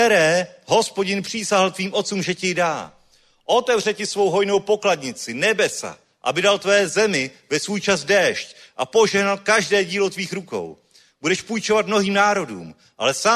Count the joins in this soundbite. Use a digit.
0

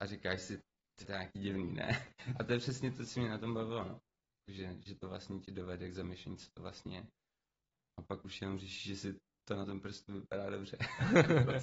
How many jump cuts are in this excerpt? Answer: 1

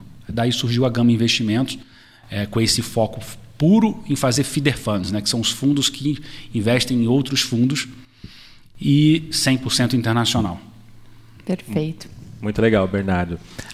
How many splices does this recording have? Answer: 0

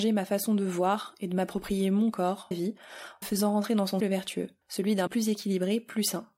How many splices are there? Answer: 5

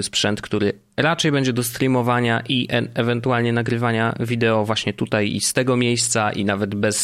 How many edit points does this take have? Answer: 0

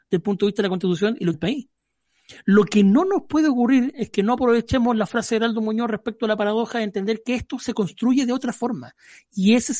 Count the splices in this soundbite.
1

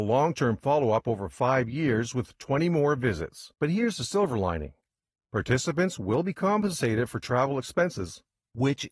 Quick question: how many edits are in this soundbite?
1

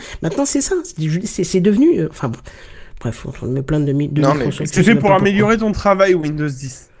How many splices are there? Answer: 0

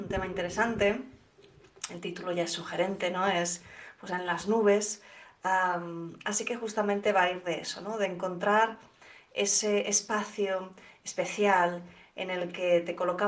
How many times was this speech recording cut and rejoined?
0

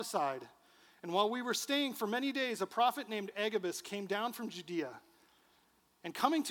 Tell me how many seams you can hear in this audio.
0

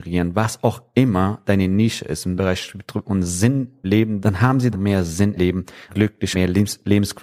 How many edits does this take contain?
8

